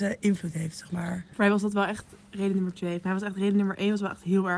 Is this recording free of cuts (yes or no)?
yes